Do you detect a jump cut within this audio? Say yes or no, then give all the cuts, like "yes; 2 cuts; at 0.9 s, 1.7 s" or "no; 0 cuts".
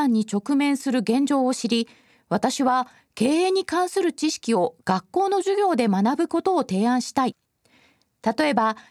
no; 0 cuts